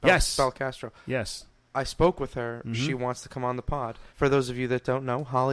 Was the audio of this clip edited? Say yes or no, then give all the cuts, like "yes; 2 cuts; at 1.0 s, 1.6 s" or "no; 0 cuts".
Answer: yes; 1 cut; at 4.1 s